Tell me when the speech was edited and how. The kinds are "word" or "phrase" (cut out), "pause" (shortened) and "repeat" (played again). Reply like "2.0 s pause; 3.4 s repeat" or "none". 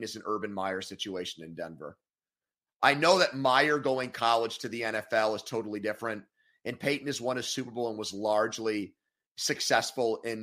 none